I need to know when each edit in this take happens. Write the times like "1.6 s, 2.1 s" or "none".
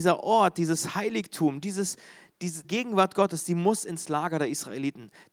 2.6 s